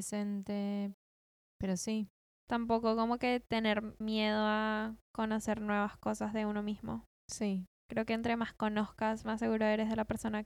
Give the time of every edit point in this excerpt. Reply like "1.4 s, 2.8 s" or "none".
4.0 s